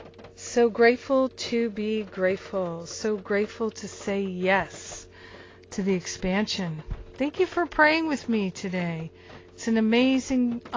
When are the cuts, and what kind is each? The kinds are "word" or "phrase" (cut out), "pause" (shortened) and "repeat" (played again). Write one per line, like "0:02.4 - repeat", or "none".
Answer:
none